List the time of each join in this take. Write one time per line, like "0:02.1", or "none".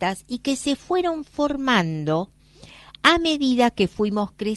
none